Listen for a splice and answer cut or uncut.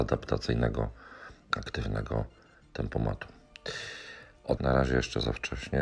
cut